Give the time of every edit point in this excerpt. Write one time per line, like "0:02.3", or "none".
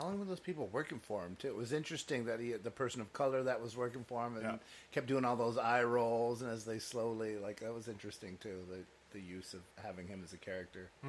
0:09.7